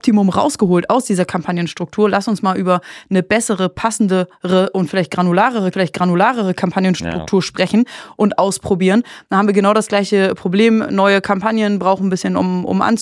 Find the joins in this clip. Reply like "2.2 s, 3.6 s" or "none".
5.7 s